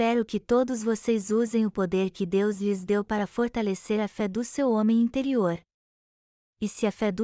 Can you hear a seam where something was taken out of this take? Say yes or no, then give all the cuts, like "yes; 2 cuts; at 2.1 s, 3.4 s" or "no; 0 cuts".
no; 0 cuts